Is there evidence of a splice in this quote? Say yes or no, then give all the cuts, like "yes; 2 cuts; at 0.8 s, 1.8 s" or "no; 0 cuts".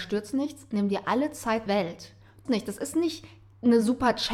yes; 2 cuts; at 1.7 s, 2.5 s